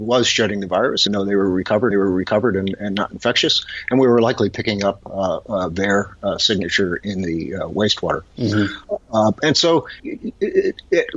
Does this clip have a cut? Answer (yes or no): yes